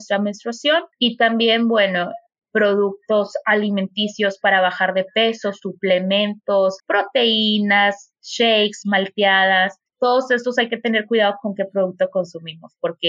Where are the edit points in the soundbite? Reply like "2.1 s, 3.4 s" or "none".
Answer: 0.9 s, 6.8 s, 9.9 s